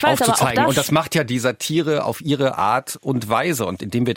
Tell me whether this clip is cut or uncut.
uncut